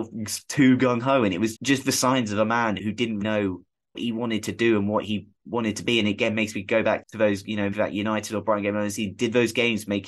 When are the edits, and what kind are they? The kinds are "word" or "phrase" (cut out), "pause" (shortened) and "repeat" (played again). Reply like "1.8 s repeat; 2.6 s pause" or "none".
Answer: 1.5 s word; 2.8 s word; 3.2 s word; 3.9 s word; 7.0 s word; 7.7 s word

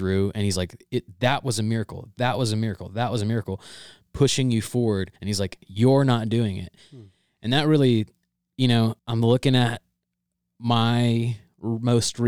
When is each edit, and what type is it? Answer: 5.2 s pause; 9.0 s pause

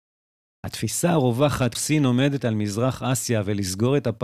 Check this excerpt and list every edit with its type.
1.7 s word; 2.4 s word

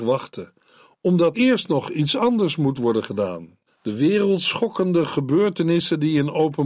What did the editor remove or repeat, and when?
1.3 s word; 3.7 s pause

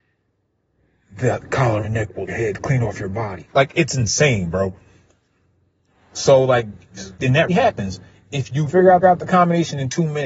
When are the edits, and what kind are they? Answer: 1.8 s word; 2.3 s phrase; 3.5 s pause; 7.2 s pause; 7.5 s word; 8.7 s word; 9.0 s repeat

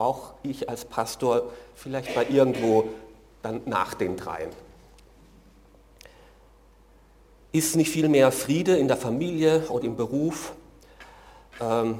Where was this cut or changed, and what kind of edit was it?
9.8 s word

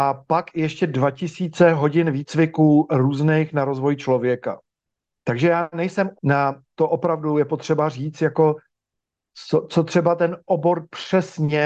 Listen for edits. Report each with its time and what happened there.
6.1 s word; 6.7 s phrase

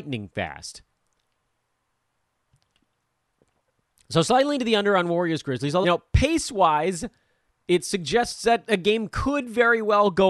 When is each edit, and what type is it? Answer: 5.8 s phrase

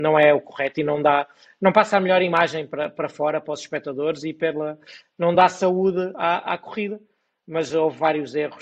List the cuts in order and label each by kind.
none

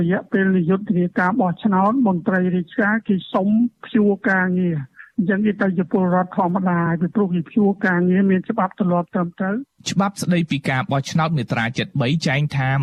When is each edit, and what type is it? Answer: 9.7 s pause

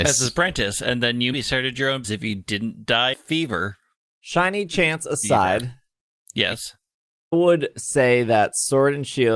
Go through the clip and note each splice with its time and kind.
1.3 s word; 2.0 s word; 3.1 s word; 7.3 s word

